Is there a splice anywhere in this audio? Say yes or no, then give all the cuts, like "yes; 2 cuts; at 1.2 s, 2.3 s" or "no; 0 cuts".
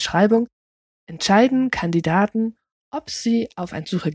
no; 0 cuts